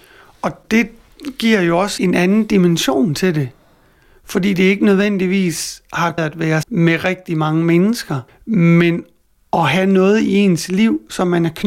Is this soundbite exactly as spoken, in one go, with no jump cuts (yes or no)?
no